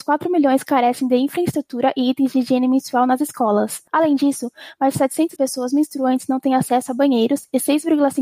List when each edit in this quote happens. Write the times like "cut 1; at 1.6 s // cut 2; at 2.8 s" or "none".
cut 1; at 3.9 s // cut 2; at 5.4 s